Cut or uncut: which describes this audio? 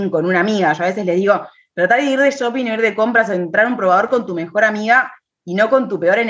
uncut